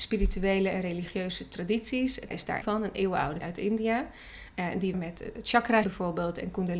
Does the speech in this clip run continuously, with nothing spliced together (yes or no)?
no